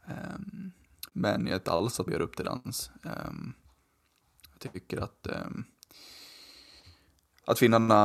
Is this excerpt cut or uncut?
cut